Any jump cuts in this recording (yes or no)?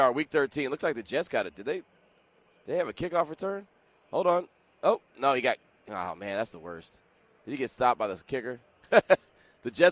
no